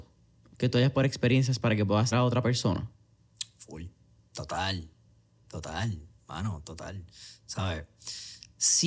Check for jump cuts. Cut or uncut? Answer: cut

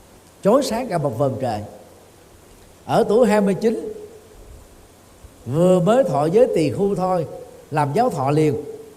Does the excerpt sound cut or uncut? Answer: cut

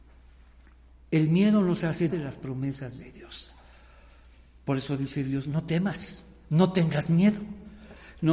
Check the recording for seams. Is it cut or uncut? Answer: cut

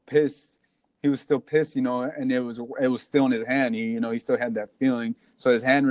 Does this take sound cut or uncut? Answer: uncut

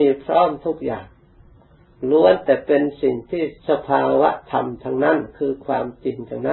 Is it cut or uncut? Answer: cut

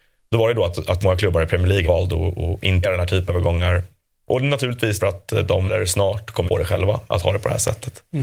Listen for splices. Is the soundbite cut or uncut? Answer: cut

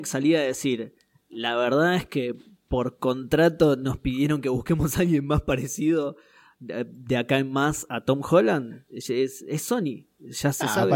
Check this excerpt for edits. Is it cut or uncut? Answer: uncut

